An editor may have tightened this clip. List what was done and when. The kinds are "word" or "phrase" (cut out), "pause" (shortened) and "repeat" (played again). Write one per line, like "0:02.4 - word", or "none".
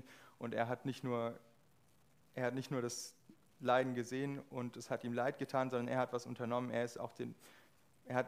none